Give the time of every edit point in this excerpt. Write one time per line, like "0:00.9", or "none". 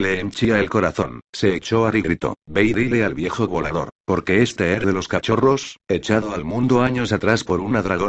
0:01.3
0:01.9
0:02.4
0:03.5
0:04.0
0:04.8

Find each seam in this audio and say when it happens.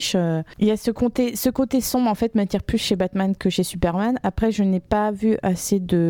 none

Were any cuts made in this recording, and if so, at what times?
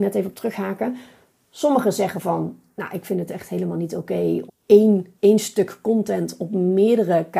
0:04.5
0:05.2

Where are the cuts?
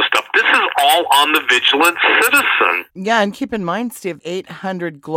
0:02.9
0:04.2

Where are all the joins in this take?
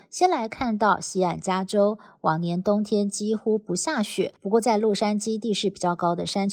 0:04.4

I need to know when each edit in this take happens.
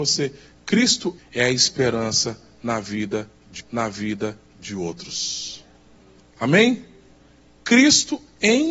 0:01.2
0:03.6

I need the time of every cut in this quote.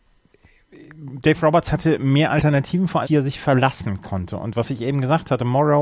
0:03.0

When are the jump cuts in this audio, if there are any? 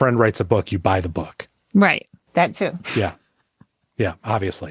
none

